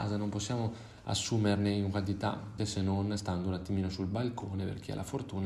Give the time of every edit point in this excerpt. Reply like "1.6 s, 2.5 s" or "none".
2.6 s